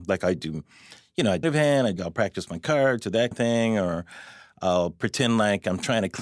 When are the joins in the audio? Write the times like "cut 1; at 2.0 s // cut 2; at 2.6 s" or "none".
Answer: cut 1; at 1.4 s // cut 2; at 2.0 s // cut 3; at 3.3 s